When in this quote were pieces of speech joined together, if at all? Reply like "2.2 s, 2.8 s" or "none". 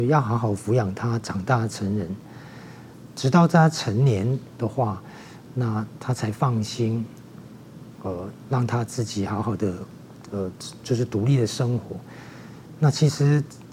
none